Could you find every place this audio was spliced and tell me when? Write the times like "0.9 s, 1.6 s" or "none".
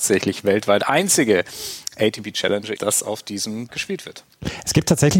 2.8 s, 3.7 s